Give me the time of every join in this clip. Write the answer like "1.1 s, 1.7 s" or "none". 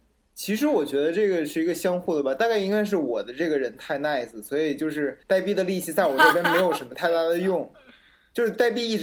5.2 s